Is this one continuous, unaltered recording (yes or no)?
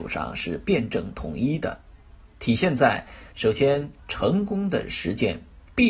no